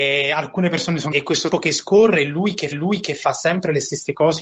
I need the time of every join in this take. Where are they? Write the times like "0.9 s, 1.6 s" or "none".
1.1 s, 1.5 s, 2.7 s